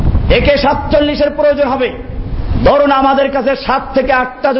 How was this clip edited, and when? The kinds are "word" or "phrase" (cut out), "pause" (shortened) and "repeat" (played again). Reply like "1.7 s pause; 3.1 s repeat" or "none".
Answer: none